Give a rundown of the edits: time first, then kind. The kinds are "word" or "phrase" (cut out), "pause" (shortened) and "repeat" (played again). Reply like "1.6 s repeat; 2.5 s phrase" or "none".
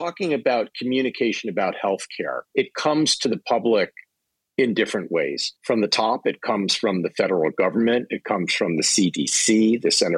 2.4 s pause; 5.6 s pause